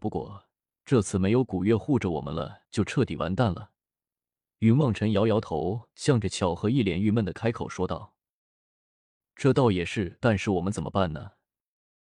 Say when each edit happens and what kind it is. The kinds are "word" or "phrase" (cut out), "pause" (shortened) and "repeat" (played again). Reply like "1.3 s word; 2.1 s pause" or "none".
2.6 s pause